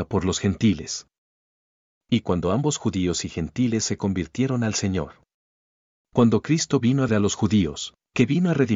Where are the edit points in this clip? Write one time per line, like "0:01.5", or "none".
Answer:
0:07.1